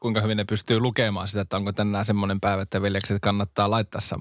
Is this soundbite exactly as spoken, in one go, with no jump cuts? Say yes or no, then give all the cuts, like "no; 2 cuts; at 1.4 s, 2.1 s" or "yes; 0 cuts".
yes; 0 cuts